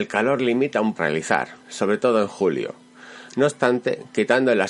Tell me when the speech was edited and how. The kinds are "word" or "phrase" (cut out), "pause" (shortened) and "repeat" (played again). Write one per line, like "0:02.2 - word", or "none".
0:01.0 - phrase
0:01.6 - pause